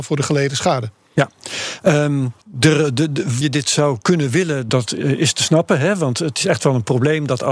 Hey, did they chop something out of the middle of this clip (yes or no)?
yes